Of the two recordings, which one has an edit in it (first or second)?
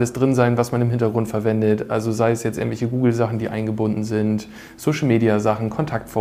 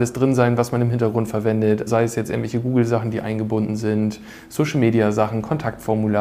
second